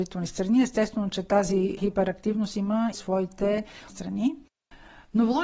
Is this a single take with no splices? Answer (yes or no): no